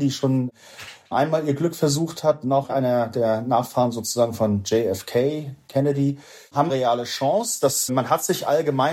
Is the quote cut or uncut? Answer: cut